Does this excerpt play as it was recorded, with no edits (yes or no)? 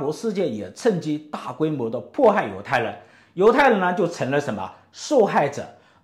yes